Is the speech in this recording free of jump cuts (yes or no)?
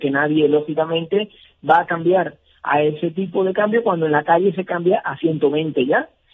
yes